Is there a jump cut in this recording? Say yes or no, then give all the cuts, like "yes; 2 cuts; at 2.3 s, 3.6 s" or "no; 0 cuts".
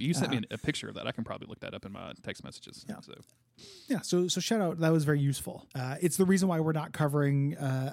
yes; 1 cut; at 5.7 s